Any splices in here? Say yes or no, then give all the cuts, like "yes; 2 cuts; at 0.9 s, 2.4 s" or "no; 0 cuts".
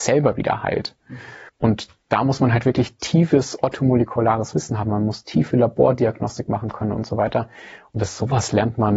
yes; 1 cut; at 1.5 s